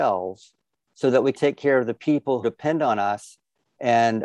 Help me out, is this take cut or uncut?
cut